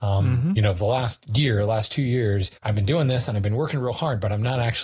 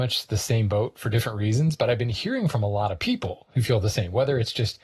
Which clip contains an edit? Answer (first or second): first